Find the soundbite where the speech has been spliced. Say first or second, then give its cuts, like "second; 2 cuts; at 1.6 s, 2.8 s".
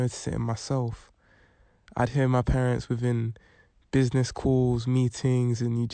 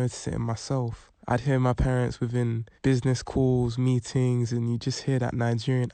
second; 2 cuts; at 1.2 s, 2.8 s